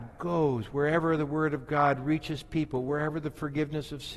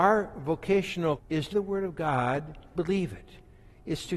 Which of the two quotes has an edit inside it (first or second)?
second